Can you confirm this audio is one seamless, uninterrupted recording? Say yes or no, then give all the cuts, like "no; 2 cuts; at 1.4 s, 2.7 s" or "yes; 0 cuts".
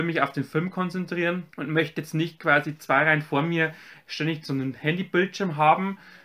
no; 1 cut; at 1.5 s